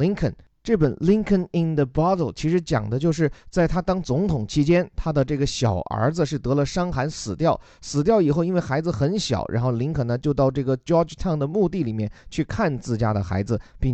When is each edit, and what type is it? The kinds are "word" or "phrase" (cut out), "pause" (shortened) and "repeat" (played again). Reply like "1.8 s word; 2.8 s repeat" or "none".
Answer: none